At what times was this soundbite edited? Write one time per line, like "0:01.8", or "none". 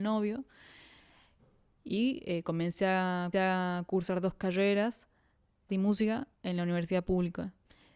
0:03.3
0:05.7
0:06.3